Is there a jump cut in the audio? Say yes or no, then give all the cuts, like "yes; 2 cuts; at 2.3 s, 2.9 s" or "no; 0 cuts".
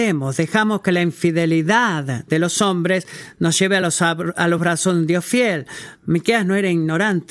no; 0 cuts